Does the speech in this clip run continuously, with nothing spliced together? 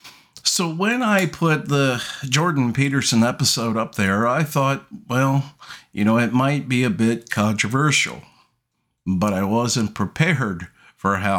yes; 0 cuts

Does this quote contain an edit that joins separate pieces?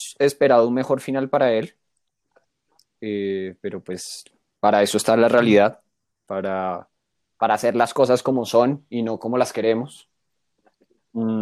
no; 0 cuts

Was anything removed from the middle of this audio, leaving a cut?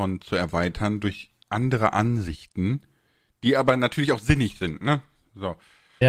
no; 0 cuts

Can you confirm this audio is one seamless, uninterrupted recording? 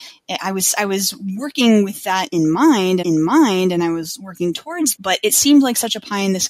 no; 2 cuts; at 3.0 s, 4.9 s

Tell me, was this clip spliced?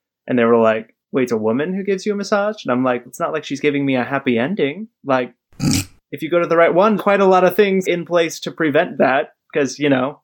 yes; 5 cuts; at 1.0 s, 3.1 s, 5.0 s, 7.0 s, 7.8 s

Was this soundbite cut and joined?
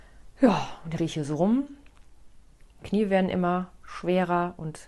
yes; 2 cuts; at 1.0 s, 2.8 s

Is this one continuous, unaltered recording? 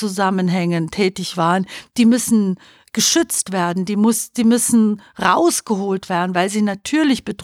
yes; 0 cuts

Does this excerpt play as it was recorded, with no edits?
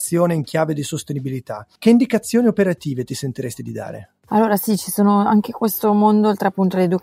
no; 1 cut; at 1.8 s

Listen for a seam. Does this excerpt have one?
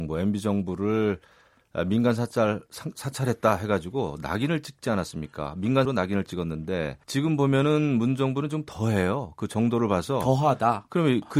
yes; 2 cuts; at 5.9 s, 7.0 s

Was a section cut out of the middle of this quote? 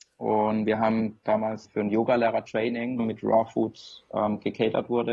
yes; 3 cuts; at 1.3 s, 1.6 s, 3.0 s

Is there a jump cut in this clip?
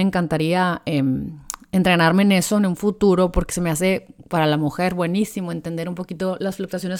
no; 0 cuts

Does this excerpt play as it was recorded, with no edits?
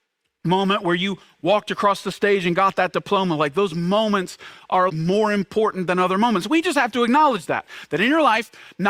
no; 1 cut; at 4.9 s

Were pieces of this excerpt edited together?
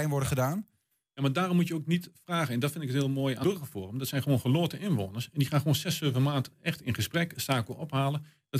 yes; 2 cuts; at 3.4 s, 7.3 s

